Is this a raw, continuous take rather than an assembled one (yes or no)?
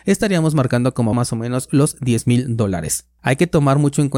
no